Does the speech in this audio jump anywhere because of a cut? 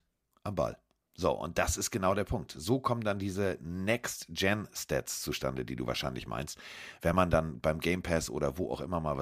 no; 0 cuts

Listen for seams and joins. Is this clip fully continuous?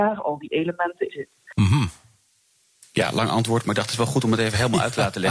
no; 1 cut; at 1.1 s

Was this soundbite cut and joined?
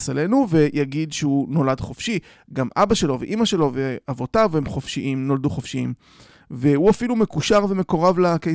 no; 0 cuts

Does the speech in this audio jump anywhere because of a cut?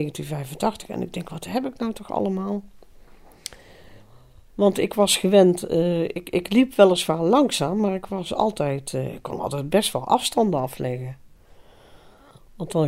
no; 0 cuts

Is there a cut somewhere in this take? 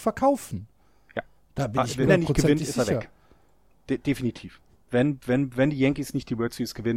yes; 1 cut; at 2.1 s

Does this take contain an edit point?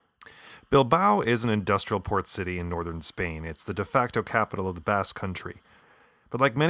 no; 0 cuts

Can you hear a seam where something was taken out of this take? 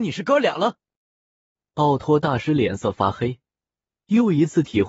no; 0 cuts

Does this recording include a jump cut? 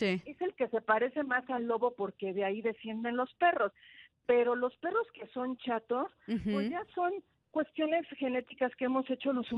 no; 0 cuts

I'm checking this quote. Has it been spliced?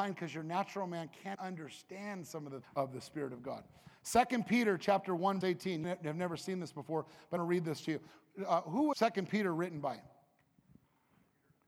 yes; 6 cuts; at 1.3 s, 2.6 s, 5.4 s, 5.8 s, 7.4 s, 8.9 s

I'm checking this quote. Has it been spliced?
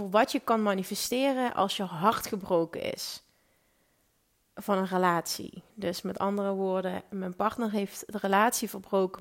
no; 0 cuts

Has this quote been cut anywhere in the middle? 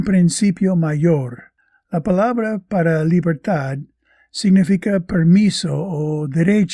no; 0 cuts

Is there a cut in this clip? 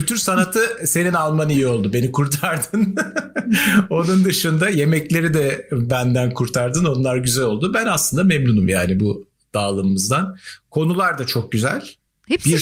no; 0 cuts

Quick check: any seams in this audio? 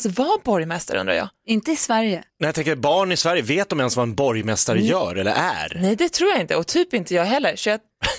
yes; 1 cut; at 2.3 s

